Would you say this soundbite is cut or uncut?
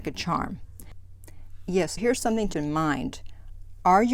cut